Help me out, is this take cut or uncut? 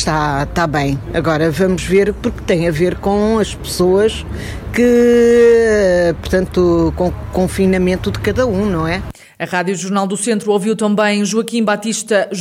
uncut